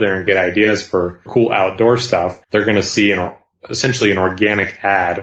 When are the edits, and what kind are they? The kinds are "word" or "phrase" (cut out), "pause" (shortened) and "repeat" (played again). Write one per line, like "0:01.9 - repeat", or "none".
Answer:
0:01.3 - word
0:02.4 - pause